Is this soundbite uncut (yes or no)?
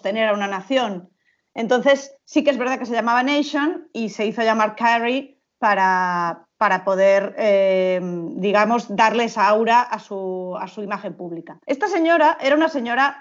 no